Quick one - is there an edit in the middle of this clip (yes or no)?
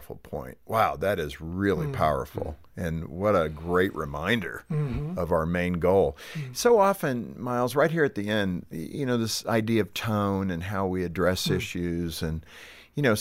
no